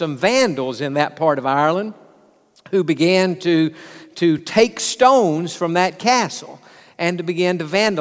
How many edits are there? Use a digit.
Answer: 0